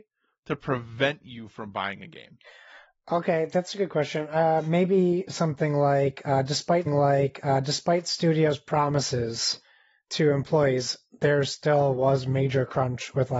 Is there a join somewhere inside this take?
yes; 1 cut; at 6.9 s

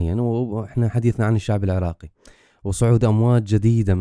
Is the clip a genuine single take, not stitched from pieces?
yes; 0 cuts

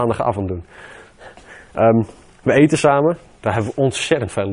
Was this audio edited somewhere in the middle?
no; 0 cuts

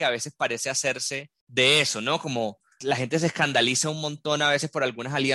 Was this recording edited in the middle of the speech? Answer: yes; 1 cut; at 1.4 s

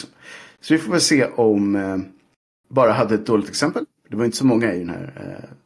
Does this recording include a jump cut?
no; 0 cuts

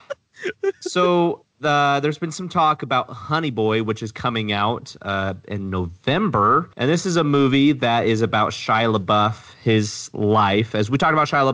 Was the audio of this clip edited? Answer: yes; 2 cuts; at 1.5 s, 6.7 s

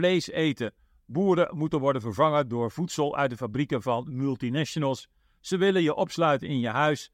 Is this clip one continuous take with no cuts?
yes; 0 cuts

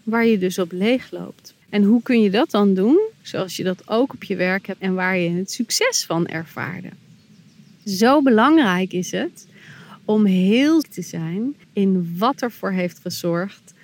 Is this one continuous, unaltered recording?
no; 4 cuts; at 1.6 s, 4.8 s, 10.8 s, 11.6 s

